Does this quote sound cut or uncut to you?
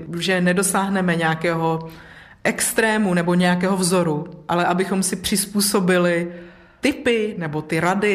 uncut